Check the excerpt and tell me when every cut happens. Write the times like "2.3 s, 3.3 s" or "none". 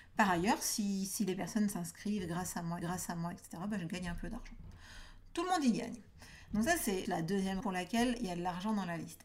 2.8 s, 7.1 s, 7.6 s